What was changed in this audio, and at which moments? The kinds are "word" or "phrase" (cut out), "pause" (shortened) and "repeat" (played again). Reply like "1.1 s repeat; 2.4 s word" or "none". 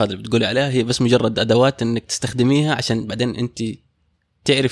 none